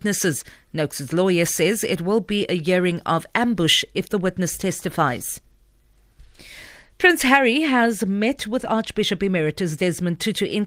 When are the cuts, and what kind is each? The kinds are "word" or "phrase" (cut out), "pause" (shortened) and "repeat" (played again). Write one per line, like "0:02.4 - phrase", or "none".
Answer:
none